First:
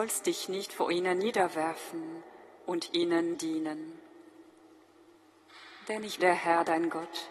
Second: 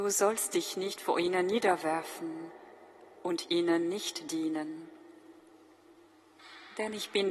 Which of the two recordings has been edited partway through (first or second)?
first